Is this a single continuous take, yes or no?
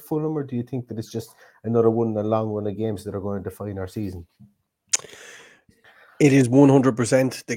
yes